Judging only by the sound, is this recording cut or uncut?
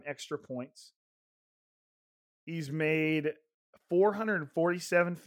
uncut